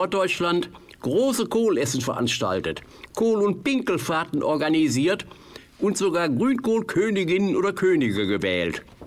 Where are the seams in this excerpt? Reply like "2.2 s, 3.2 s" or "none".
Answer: none

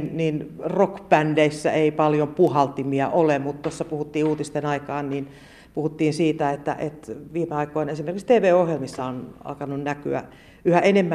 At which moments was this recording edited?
none

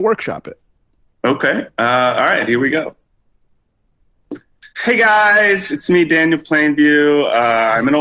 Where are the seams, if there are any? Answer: 4.7 s

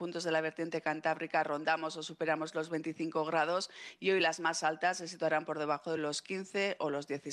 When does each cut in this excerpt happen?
none

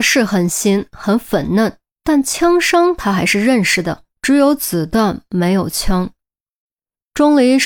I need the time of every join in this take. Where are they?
4.1 s

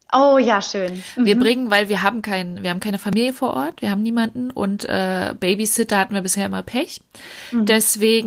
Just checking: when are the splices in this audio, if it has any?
none

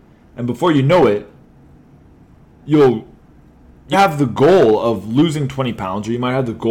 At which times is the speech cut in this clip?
3.9 s

